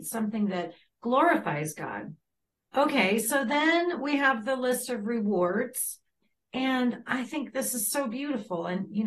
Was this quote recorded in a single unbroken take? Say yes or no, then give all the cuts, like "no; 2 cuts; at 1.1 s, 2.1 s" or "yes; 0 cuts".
yes; 0 cuts